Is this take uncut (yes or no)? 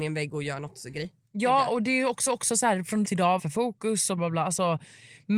no